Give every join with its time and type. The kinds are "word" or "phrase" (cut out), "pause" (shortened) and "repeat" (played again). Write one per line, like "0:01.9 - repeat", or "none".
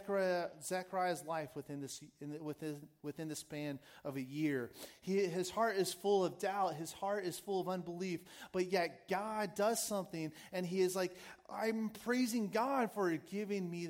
none